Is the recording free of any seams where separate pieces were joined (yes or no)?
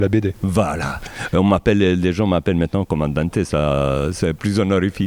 yes